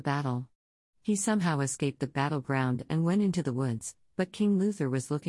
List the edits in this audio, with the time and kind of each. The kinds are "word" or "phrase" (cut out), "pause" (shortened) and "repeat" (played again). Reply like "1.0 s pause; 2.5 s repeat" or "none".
none